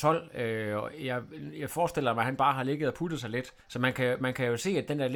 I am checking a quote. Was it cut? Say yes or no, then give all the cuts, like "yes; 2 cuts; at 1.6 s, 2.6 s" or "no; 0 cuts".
yes; 1 cut; at 3.6 s